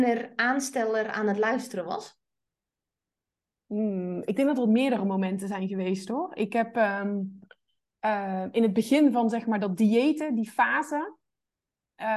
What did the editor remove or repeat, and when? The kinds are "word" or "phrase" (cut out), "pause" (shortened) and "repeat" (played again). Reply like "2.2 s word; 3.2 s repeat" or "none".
none